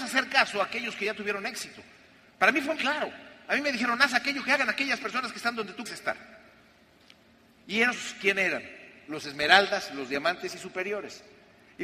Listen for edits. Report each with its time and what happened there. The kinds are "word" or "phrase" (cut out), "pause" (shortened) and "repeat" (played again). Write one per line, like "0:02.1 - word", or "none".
0:02.8 - word
0:05.9 - word